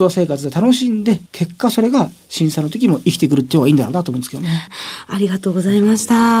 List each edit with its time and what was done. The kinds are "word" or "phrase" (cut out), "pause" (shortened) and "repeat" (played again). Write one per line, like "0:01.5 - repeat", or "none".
0:01.3 - pause